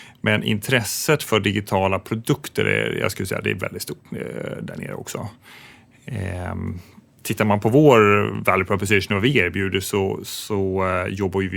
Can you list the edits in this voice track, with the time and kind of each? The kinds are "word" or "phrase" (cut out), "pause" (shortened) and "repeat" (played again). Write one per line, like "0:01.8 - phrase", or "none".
none

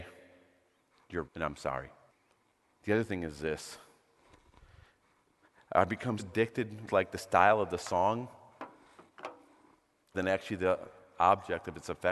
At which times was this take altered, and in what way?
0:01.2 - word
0:02.1 - pause
0:06.2 - word
0:06.9 - word
0:10.1 - phrase

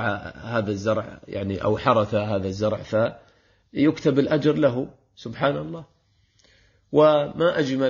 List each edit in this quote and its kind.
none

